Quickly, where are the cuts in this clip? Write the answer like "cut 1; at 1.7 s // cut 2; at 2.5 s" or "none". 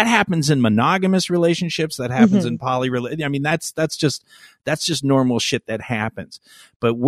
none